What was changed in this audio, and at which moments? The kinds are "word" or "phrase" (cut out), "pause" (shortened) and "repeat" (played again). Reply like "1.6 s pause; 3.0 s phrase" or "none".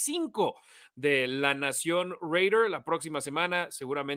none